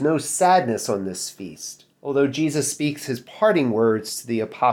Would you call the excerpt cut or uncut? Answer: cut